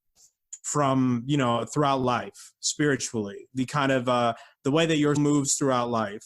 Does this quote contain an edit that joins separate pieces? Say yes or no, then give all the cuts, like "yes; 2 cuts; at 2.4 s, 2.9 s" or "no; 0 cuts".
yes; 1 cut; at 5.2 s